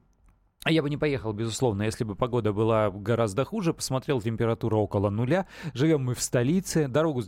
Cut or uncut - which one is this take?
uncut